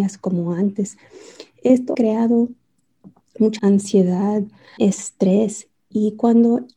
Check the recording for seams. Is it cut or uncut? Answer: cut